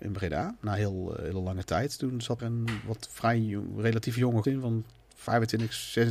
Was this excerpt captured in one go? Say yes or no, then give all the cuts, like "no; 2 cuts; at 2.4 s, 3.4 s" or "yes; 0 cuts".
no; 2 cuts; at 2.4 s, 4.4 s